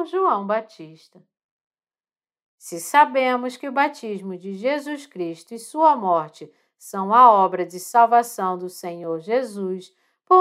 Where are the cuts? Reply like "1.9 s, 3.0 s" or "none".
none